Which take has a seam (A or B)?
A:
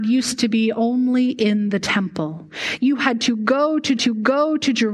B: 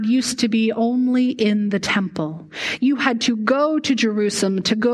A